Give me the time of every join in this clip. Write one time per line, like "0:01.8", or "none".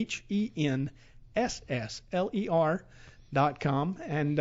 none